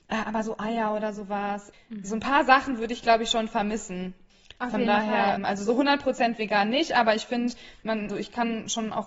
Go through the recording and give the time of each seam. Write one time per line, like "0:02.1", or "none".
0:08.1